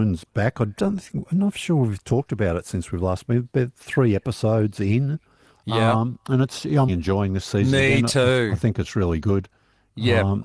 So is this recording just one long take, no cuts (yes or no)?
no